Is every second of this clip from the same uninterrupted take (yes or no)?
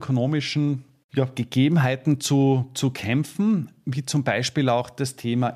yes